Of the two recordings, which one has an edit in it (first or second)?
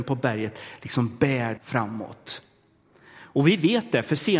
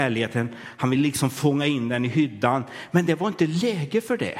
first